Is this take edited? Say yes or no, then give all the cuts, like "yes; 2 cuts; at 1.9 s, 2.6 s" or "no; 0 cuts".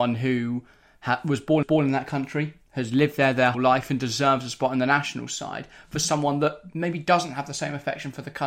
yes; 2 cuts; at 1.6 s, 3.5 s